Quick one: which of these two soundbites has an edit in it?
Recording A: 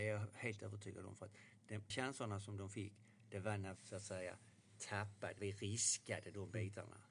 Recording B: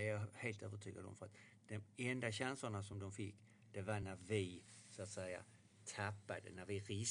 A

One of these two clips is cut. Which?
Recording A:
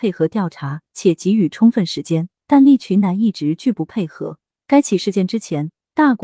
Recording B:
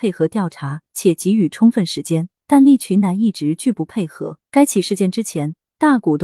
B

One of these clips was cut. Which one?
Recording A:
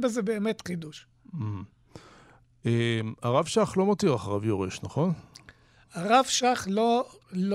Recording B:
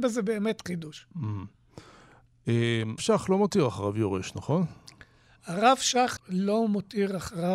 B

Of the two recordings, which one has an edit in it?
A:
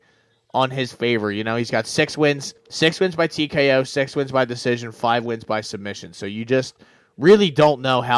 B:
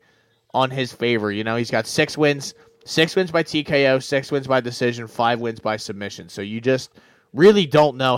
A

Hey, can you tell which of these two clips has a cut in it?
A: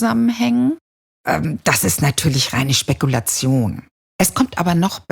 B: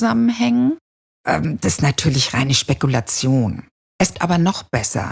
B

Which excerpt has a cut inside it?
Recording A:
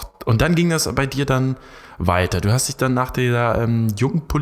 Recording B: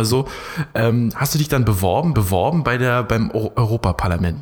B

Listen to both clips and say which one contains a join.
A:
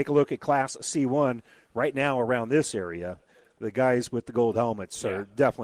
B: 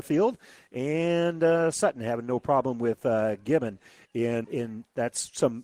B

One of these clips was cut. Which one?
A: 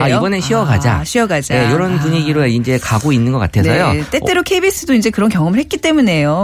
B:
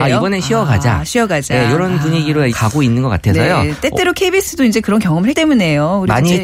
B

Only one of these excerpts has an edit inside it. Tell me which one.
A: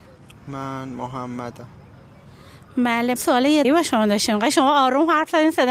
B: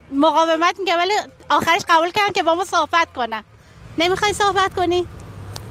A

